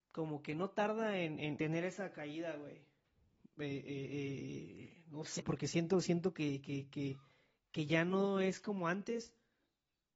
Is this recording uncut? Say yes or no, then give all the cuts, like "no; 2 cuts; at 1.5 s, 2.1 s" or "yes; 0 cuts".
no; 2 cuts; at 1.6 s, 5.4 s